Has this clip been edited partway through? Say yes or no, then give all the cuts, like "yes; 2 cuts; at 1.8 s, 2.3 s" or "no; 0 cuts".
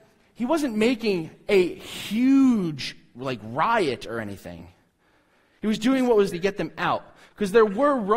yes; 1 cut; at 6.3 s